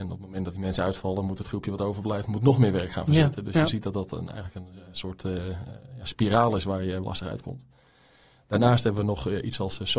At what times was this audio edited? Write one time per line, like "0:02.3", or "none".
0:07.0